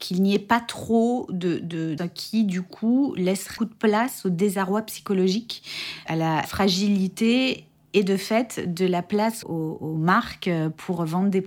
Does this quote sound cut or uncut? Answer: cut